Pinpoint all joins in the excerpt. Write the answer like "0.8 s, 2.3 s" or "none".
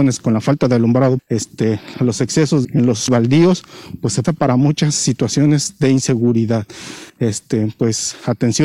1.2 s, 1.9 s, 2.6 s, 3.1 s, 4.2 s